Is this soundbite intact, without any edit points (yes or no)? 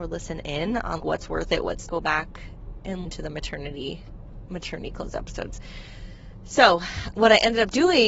no